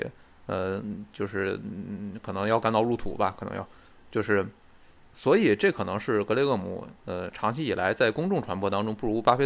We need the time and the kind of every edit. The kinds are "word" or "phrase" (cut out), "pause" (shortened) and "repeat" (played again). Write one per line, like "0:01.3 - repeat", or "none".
0:04.1 - word
0:05.0 - word
0:06.9 - pause